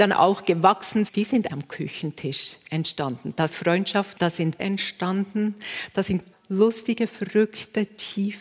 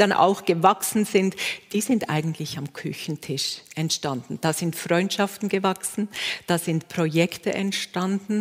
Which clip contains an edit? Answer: first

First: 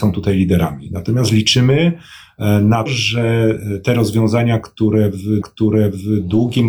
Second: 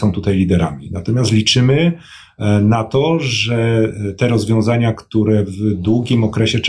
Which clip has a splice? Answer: first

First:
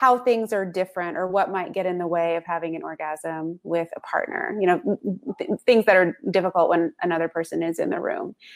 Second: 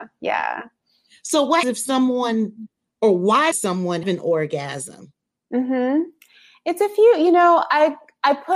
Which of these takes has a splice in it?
second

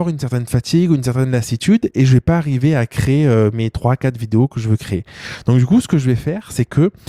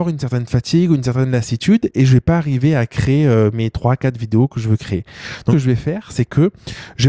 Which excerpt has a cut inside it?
second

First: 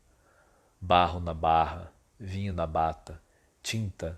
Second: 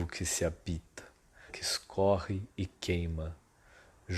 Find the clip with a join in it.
second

